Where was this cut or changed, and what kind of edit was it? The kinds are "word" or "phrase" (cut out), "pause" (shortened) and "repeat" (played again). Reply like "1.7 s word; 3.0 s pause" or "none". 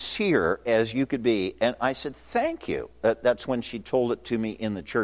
none